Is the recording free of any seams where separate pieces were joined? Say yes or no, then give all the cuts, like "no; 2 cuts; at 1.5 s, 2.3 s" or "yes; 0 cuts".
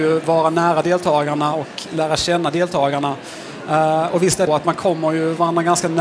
no; 1 cut; at 4.5 s